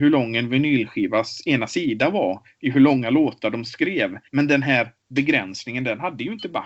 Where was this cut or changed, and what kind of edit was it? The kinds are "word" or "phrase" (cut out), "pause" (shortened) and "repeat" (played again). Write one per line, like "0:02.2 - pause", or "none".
0:04.3 - pause